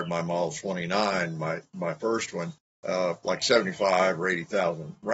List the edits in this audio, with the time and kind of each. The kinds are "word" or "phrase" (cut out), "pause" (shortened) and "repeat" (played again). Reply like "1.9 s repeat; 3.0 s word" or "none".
2.6 s pause

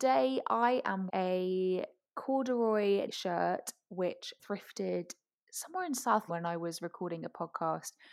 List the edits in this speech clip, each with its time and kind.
1.1 s word; 3.1 s word; 4.4 s word; 6.3 s word

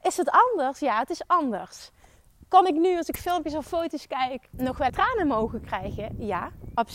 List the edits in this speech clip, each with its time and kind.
4.5 s word; 4.9 s word

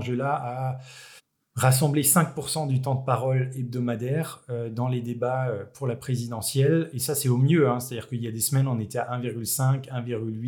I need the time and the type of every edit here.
1.2 s pause

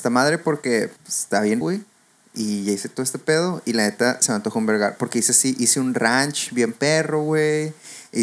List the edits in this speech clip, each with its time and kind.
1.0 s pause; 1.6 s word

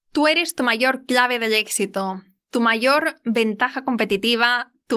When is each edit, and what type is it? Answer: none

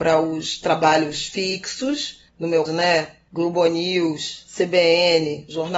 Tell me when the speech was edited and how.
2.3 s pause; 2.7 s word

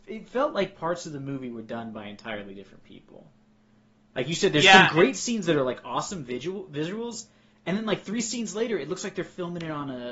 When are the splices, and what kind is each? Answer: none

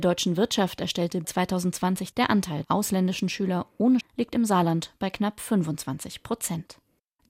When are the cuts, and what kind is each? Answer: 1.2 s word; 2.1 s word; 2.6 s word; 4.0 s word

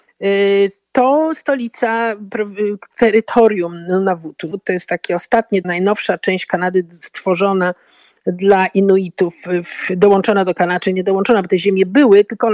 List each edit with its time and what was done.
4.5 s word; 5.6 s word

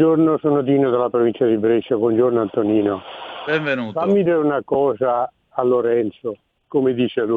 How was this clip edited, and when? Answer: 4.3 s phrase; 5.4 s pause

